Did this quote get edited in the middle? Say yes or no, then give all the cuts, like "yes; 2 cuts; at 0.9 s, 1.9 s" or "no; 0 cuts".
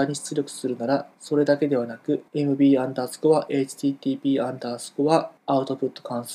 yes; 3 cuts; at 1.1 s, 2.3 s, 5.4 s